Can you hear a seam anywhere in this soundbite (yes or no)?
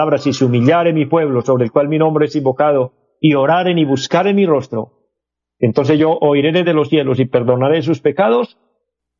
no